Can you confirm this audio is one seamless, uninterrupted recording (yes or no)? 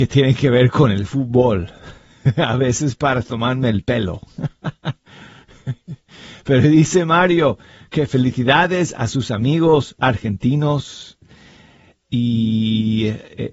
yes